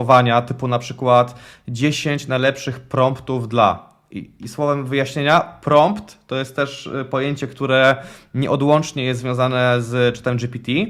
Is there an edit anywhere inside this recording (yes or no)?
no